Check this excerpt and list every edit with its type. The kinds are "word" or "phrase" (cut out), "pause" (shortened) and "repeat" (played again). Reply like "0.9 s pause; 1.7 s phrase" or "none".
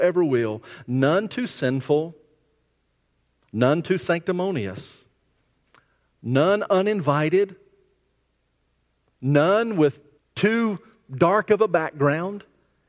10.2 s pause